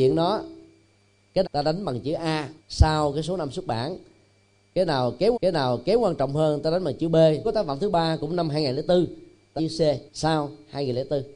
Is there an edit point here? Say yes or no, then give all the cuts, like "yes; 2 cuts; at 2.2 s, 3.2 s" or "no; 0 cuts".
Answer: yes; 6 cuts; at 1.4 s, 2.6 s, 5.3 s, 7.4 s, 9.6 s, 10.1 s